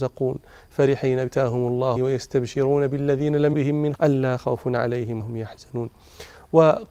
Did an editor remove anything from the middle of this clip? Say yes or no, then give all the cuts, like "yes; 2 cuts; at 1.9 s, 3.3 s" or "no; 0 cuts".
yes; 5 cuts; at 1.3 s, 2.0 s, 3.5 s, 4.0 s, 5.2 s